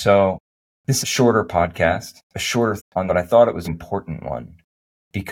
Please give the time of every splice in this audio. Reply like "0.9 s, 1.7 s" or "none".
1.0 s, 2.3 s, 2.8 s, 3.1 s, 3.6 s